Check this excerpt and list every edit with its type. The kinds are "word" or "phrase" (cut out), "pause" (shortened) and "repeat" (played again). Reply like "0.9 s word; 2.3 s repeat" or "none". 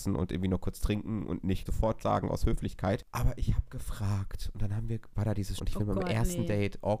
1.7 s word; 2.0 s word; 5.6 s word